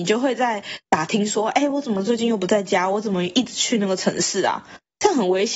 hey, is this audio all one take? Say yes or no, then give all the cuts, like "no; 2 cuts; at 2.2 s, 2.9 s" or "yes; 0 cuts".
yes; 0 cuts